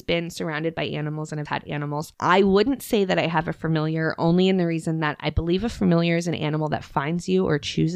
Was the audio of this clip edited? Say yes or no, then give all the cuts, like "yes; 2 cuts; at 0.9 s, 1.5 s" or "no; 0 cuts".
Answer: yes; 1 cut; at 1.5 s